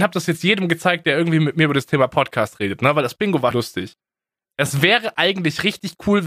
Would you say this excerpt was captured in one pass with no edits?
no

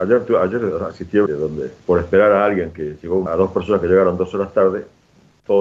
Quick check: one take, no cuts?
no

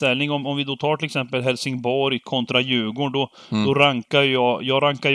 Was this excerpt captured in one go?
yes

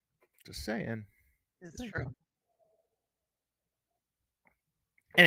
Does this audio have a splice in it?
yes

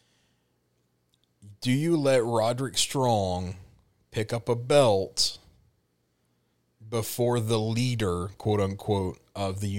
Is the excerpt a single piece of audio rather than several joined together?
yes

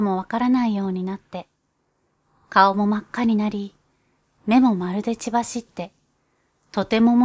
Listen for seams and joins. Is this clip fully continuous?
yes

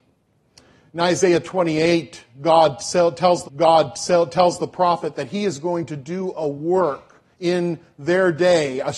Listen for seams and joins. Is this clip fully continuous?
no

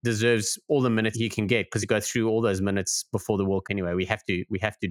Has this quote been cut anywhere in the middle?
yes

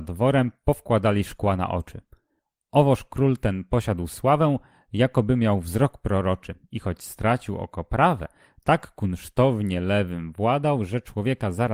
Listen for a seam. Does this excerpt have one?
no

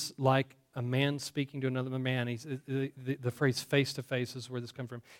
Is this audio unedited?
yes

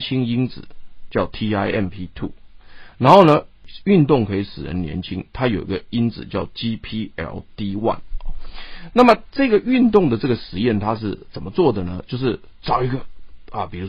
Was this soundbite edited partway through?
no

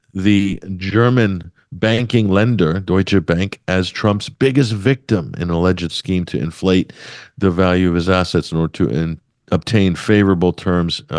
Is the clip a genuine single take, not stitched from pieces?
yes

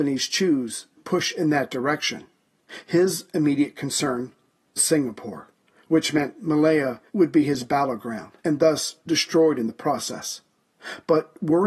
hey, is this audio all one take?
no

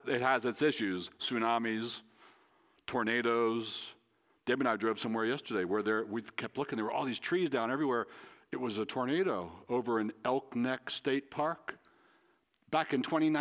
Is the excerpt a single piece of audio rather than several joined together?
yes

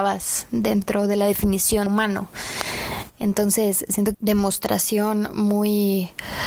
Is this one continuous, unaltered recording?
no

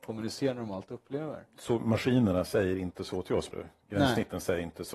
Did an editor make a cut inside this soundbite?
yes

